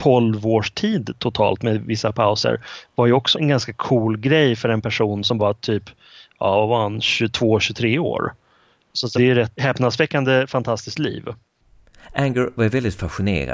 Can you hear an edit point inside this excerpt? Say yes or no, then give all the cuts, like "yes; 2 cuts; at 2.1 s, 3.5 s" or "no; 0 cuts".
yes; 4 cuts; at 3.3 s, 5.4 s, 9.1 s, 9.6 s